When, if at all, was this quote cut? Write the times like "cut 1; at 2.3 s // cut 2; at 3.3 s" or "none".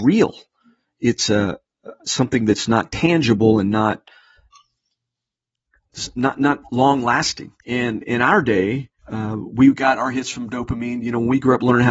cut 1; at 7.6 s // cut 2; at 9.0 s